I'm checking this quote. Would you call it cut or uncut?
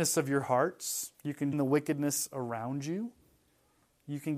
cut